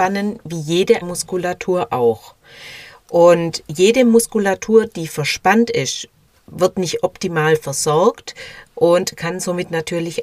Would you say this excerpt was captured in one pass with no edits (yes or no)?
no